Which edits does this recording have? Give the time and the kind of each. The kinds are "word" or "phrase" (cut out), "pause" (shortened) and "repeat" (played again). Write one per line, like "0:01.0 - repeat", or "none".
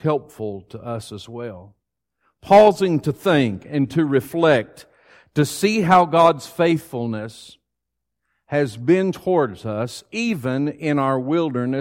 none

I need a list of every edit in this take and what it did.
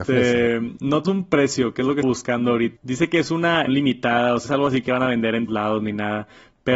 0:01.0 - word
0:02.0 - word
0:02.8 - word
0:03.7 - word
0:04.5 - word
0:05.5 - word

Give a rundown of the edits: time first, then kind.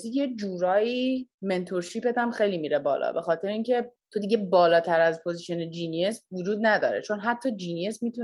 0:01.3 - pause

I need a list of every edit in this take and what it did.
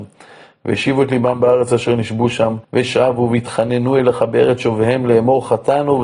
0:02.6 - pause

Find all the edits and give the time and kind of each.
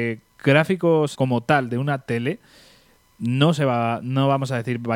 0:01.1 - word

